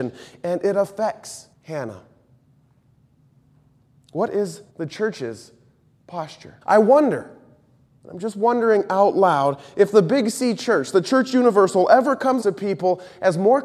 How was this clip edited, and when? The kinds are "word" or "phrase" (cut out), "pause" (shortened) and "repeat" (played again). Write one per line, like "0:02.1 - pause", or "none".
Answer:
0:01.5 - pause
0:04.7 - pause
0:06.6 - pause
0:12.4 - word